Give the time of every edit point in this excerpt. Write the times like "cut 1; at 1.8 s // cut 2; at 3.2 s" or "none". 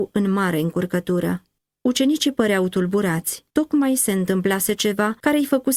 cut 1; at 1.6 s // cut 2; at 3.5 s

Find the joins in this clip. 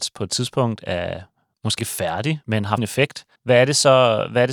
cut 1; at 1.8 s // cut 2; at 2.4 s // cut 3; at 2.8 s // cut 4; at 3.4 s

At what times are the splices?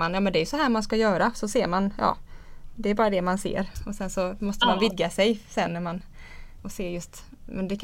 cut 1; at 6.6 s

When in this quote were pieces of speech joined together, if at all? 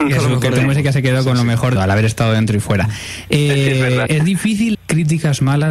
cut 1; at 1.8 s // cut 2; at 4.1 s // cut 3; at 4.7 s

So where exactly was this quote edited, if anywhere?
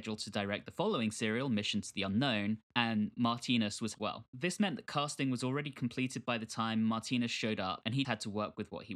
cut 1; at 3.9 s // cut 2; at 8.0 s

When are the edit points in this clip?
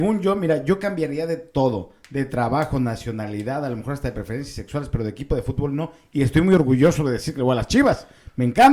none

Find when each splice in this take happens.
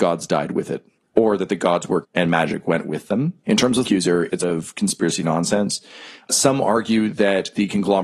cut 1; at 2.0 s // cut 2; at 3.8 s // cut 3; at 4.4 s // cut 4; at 5.2 s

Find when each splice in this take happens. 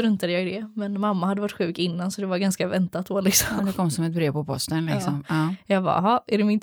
none

